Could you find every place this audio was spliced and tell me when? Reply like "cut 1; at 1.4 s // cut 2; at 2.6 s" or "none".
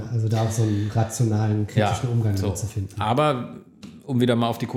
none